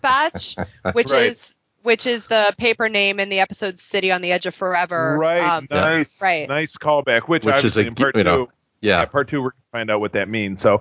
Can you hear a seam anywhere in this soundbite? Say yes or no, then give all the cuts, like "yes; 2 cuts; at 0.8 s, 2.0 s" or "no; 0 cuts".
no; 0 cuts